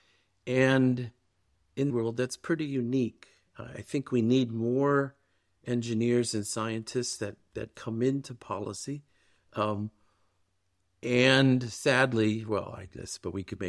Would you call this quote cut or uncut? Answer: cut